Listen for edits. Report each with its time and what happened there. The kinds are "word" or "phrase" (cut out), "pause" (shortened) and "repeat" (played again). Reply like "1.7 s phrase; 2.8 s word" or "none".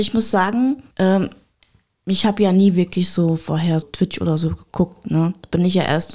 0.9 s pause; 3.8 s word